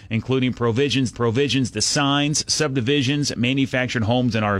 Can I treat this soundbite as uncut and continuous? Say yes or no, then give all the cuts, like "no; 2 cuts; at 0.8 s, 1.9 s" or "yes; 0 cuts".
no; 1 cut; at 1.1 s